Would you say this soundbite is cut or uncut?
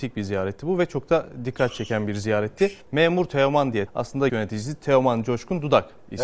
cut